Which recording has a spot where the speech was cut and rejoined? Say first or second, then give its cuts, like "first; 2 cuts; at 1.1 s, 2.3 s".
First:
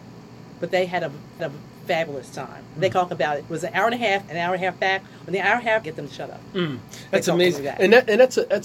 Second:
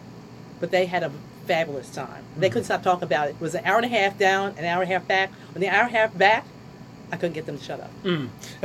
first; 4 cuts; at 1.4 s, 2.9 s, 4.3 s, 5.8 s